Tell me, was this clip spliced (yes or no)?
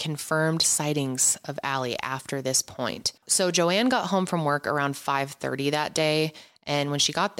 yes